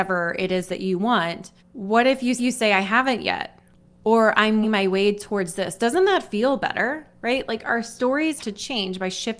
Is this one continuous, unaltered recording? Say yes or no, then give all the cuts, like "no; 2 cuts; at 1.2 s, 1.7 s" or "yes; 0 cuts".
no; 4 cuts; at 1.6 s, 2.4 s, 4.6 s, 8.4 s